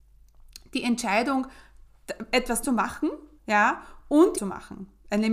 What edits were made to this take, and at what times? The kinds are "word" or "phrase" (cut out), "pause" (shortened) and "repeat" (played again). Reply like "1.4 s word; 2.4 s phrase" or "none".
2.6 s word; 3.4 s pause; 4.3 s phrase